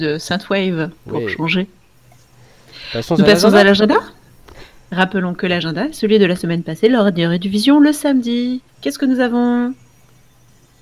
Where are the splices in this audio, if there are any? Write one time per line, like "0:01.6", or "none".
0:01.0
0:08.7